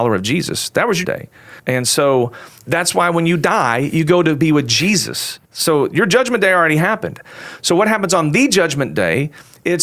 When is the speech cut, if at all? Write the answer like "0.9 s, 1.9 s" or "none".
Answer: 1.0 s, 1.6 s, 2.6 s, 5.5 s